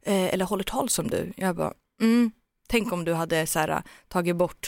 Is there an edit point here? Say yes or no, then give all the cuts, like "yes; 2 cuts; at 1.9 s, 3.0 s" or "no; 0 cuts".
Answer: no; 0 cuts